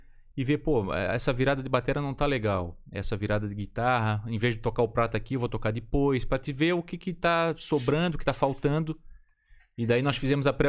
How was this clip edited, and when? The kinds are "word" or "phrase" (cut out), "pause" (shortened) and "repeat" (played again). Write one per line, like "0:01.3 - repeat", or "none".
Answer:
none